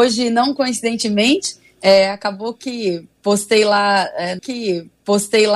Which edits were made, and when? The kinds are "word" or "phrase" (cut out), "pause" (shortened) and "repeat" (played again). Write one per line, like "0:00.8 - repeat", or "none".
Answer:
0:04.4 - repeat